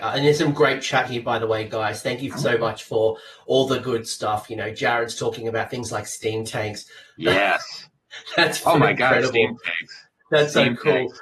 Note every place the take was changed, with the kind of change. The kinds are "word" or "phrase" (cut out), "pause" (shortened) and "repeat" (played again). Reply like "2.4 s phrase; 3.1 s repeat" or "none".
none